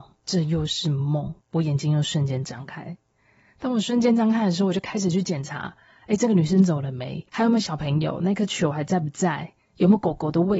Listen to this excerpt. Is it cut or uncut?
cut